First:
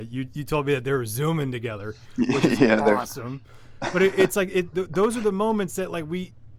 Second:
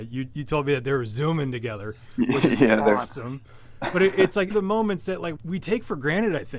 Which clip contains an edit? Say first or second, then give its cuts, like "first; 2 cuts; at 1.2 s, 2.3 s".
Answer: second; 2 cuts; at 4.5 s, 5.4 s